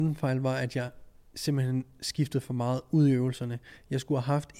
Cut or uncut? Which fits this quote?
uncut